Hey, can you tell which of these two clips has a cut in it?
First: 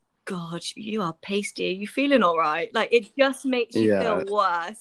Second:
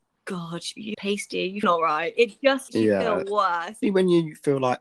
second; 5 cuts; at 0.9 s, 1.6 s, 2.2 s, 2.7 s, 3.8 s

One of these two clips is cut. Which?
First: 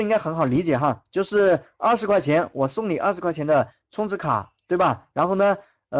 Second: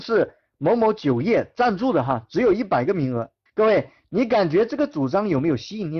second; 1 cut; at 3.5 s

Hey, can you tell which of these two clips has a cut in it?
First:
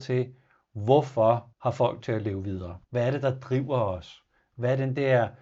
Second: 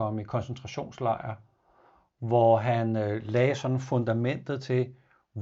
first; 3 cuts; at 1.5 s, 2.0 s, 2.8 s

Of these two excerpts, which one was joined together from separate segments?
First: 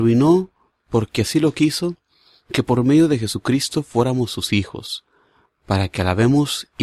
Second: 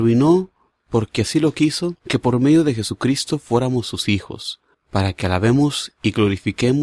second; 2 cuts; at 2.0 s, 4.7 s

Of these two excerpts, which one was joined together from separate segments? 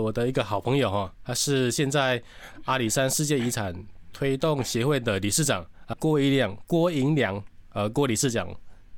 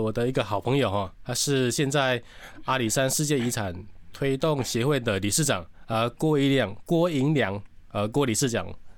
first; 1 cut; at 5.9 s

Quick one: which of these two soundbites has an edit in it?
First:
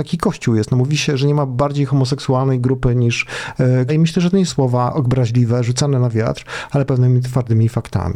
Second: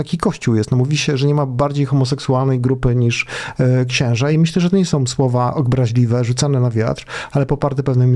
first; 3 cuts; at 3.9 s, 4.5 s, 6.9 s

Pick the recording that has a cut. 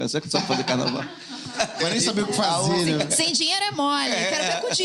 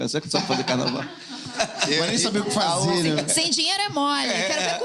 first; 1 cut; at 1.8 s

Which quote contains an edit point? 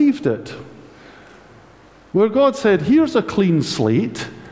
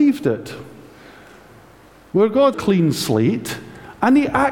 second; 1 cut; at 2.5 s

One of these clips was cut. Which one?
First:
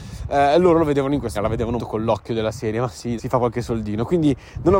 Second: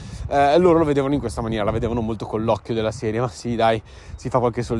first; 3 cuts; at 1.3 s, 1.8 s, 3.2 s

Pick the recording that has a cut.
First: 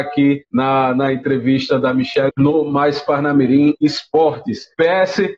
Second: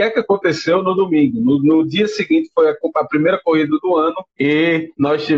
first; 1 cut; at 2.3 s

